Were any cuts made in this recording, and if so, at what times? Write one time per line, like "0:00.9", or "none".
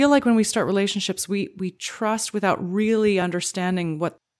none